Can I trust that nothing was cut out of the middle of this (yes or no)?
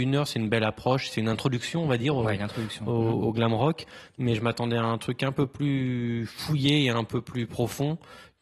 yes